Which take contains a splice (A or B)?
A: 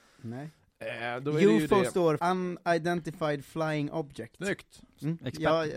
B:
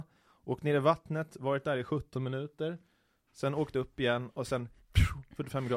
A